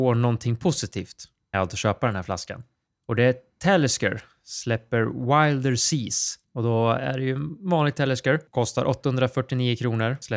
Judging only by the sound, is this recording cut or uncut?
cut